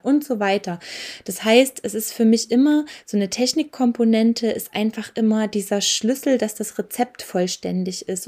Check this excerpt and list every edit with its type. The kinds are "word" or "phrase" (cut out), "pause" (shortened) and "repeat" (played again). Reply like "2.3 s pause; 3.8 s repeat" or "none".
none